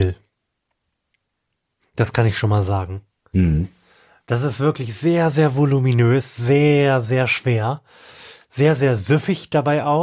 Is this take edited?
no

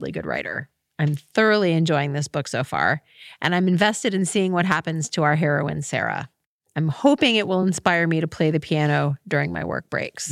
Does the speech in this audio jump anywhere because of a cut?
no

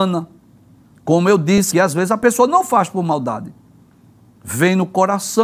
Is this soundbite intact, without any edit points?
no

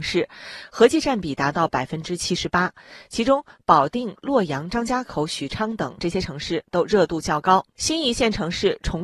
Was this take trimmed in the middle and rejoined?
no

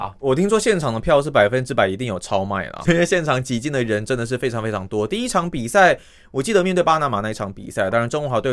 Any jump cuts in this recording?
yes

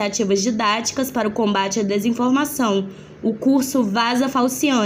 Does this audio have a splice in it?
no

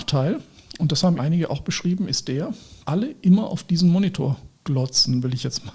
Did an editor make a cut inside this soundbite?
yes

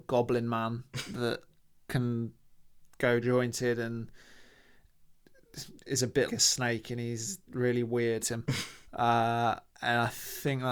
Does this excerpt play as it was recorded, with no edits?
no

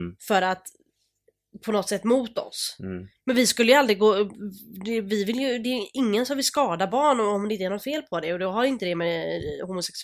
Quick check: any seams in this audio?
no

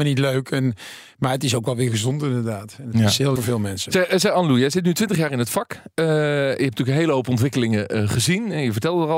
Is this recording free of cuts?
no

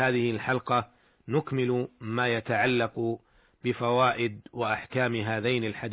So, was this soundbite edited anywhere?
no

